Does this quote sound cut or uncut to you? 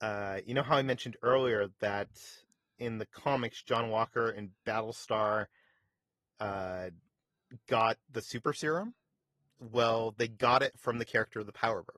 uncut